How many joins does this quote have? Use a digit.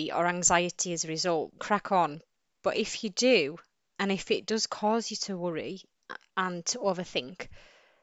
1